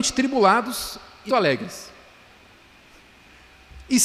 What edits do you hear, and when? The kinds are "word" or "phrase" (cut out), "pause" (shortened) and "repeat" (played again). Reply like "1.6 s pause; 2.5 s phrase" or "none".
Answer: 1.3 s word